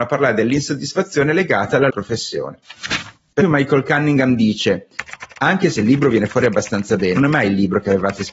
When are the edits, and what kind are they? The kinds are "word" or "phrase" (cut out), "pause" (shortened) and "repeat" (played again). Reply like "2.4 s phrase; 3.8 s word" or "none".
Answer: 1.9 s word; 3.4 s word; 7.2 s word